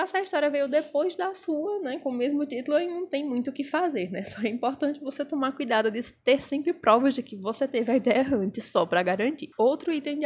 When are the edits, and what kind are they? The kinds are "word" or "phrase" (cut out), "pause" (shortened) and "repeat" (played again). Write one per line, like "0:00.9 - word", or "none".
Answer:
none